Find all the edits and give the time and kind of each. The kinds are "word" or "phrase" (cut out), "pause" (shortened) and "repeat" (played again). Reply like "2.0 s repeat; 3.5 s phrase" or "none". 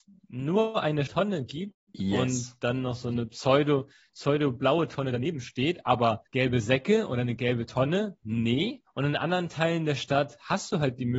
1.1 s word; 6.3 s pause; 8.9 s pause